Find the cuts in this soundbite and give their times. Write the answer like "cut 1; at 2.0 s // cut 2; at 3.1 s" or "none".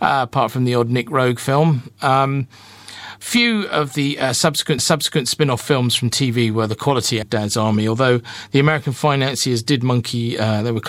cut 1; at 4.8 s // cut 2; at 7.2 s